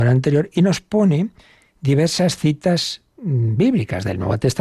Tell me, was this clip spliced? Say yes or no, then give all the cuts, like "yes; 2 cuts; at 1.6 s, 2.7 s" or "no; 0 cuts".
no; 0 cuts